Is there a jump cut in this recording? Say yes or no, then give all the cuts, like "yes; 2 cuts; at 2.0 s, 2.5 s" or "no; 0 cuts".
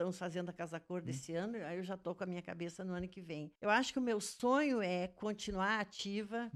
yes; 1 cut; at 3.6 s